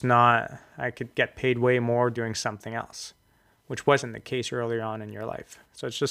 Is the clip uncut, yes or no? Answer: yes